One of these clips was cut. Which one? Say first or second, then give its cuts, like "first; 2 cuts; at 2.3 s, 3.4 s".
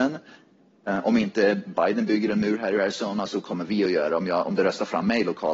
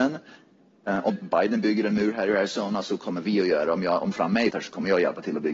second; 3 cuts; at 1.1 s, 4.1 s, 4.5 s